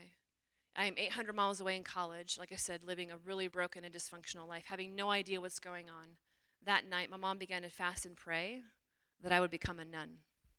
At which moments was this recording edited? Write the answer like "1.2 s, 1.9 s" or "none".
3.5 s, 6.5 s